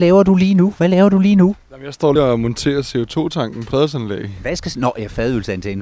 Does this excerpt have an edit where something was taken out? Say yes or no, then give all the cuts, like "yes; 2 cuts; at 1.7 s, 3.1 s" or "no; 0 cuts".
yes; 2 cuts; at 2.2 s, 3.7 s